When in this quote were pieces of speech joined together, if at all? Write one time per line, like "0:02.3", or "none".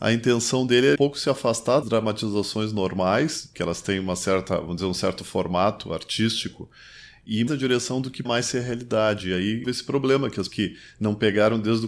0:00.9
0:01.8
0:07.5
0:08.2
0:09.6
0:10.5